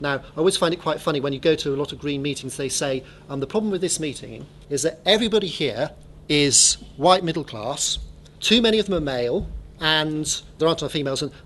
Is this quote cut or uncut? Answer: uncut